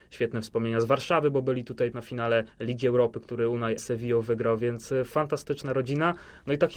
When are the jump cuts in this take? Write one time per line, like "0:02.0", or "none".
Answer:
0:01.9
0:02.5
0:03.8

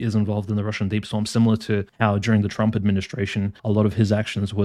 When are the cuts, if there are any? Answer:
0:03.6

